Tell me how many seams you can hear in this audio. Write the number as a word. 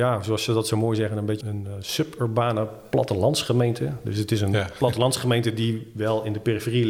one